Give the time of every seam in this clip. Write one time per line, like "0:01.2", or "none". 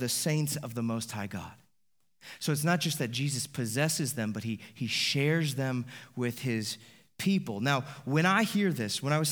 none